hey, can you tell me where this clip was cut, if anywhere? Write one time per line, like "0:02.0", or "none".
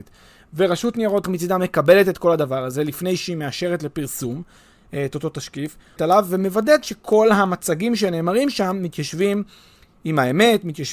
0:01.2
0:06.0